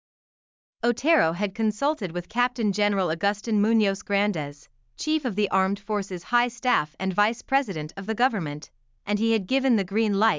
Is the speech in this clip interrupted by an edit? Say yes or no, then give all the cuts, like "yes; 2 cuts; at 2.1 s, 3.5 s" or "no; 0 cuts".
no; 0 cuts